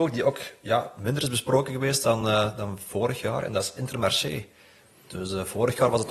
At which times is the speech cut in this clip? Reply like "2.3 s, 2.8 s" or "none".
none